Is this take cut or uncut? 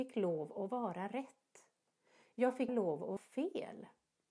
cut